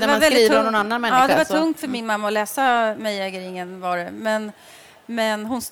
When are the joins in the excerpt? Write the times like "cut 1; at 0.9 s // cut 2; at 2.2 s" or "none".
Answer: none

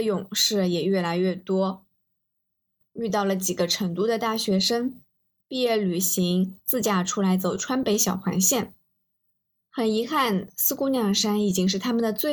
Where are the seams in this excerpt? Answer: none

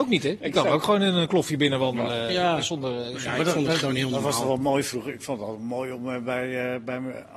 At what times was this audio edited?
none

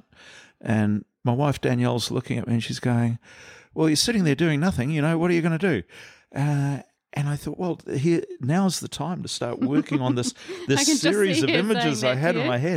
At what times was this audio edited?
none

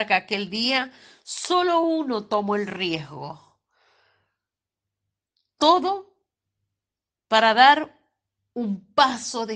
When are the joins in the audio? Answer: none

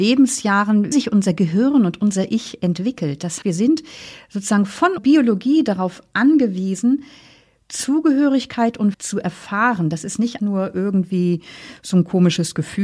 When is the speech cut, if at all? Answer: cut 1; at 0.9 s // cut 2; at 3.4 s // cut 3; at 5.0 s // cut 4; at 8.9 s // cut 5; at 10.4 s

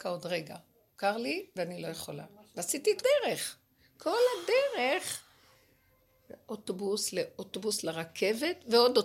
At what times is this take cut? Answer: cut 1; at 3.0 s

